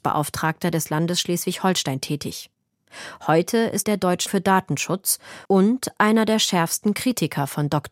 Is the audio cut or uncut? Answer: cut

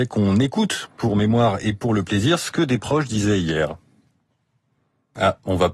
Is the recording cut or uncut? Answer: uncut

